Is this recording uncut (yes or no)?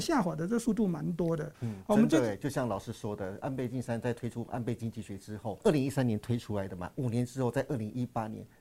no